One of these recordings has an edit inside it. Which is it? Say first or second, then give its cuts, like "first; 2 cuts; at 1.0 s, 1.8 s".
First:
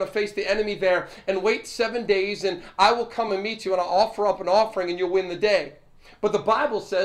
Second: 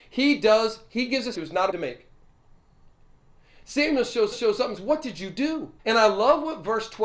second; 5 cuts; at 1.3 s, 1.7 s, 4.3 s, 4.8 s, 5.8 s